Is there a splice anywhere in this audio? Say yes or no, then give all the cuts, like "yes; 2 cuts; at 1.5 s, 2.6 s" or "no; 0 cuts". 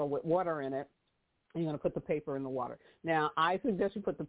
no; 0 cuts